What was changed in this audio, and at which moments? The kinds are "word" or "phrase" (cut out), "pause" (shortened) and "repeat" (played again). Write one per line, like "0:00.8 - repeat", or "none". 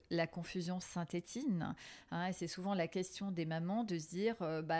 none